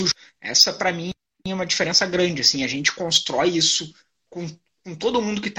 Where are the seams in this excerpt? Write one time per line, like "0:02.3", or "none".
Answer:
none